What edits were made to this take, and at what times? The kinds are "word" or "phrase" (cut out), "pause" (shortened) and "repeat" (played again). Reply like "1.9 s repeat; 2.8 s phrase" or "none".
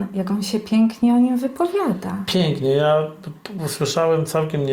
none